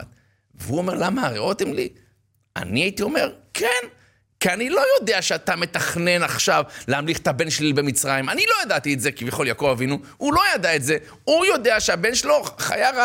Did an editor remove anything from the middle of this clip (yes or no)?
no